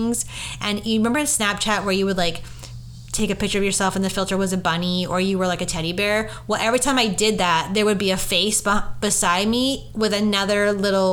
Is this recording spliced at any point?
no; 0 cuts

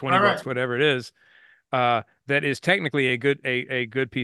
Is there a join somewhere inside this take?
no; 0 cuts

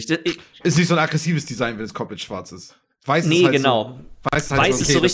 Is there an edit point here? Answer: no; 0 cuts

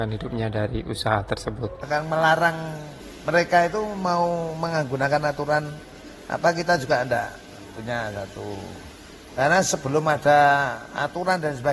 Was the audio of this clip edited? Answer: no; 0 cuts

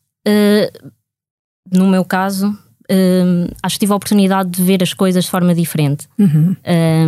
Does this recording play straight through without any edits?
yes; 0 cuts

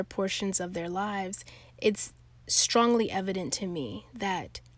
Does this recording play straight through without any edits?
yes; 0 cuts

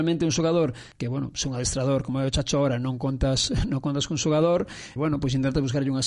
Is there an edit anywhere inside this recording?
yes; 2 cuts; at 0.9 s, 5.0 s

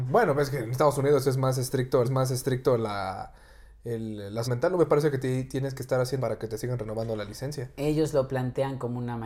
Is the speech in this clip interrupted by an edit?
yes; 3 cuts; at 2.0 s, 4.4 s, 6.2 s

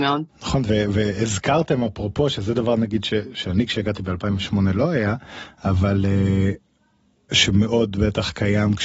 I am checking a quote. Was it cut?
no; 0 cuts

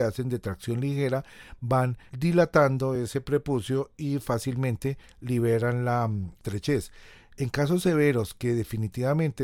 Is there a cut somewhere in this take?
no; 0 cuts

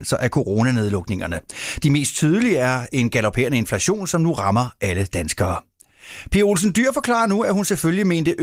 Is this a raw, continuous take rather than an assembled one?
yes; 0 cuts

